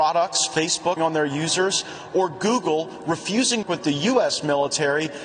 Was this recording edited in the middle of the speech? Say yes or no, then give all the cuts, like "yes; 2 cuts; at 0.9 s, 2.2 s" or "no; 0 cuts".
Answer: yes; 2 cuts; at 1.0 s, 3.6 s